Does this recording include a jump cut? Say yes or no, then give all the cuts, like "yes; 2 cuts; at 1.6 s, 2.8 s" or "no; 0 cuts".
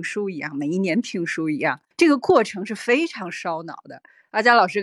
yes; 1 cut; at 1.9 s